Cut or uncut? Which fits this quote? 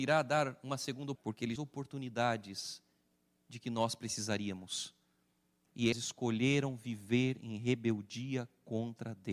cut